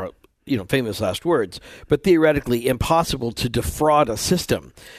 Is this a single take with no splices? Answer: yes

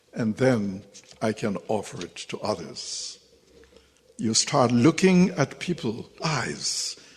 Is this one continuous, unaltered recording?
no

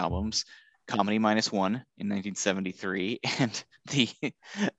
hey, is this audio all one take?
yes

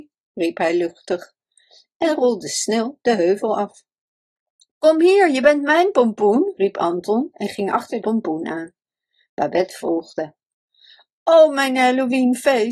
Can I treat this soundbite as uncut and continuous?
no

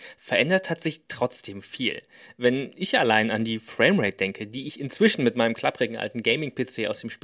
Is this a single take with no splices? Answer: yes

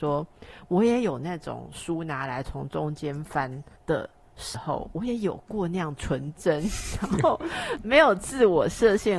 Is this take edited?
no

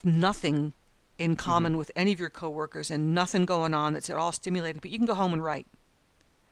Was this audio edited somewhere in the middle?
no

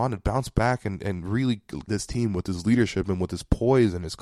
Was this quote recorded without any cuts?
no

